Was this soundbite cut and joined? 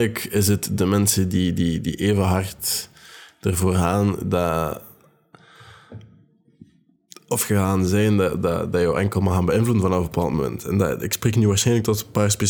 no; 0 cuts

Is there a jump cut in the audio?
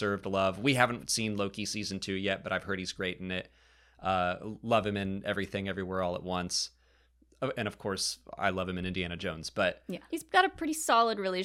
yes; 1 cut; at 10.1 s

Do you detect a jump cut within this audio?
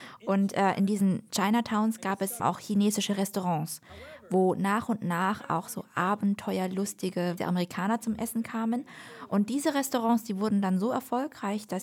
yes; 2 cuts; at 2.4 s, 7.4 s

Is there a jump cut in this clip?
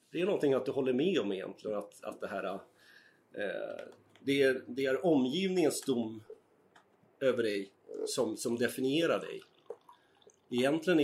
no; 0 cuts

